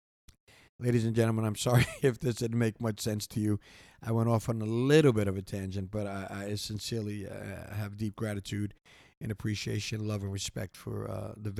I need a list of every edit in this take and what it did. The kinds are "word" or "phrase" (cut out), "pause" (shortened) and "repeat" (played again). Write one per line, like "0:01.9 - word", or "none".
none